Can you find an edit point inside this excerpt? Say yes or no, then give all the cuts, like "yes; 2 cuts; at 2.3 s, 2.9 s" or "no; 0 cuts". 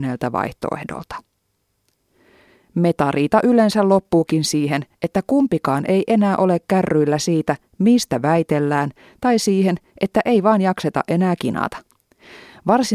no; 0 cuts